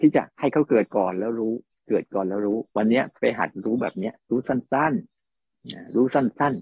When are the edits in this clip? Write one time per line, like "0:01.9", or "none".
0:01.7
0:02.7
0:03.2
0:05.1